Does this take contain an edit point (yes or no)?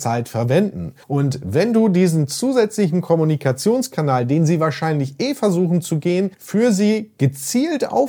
yes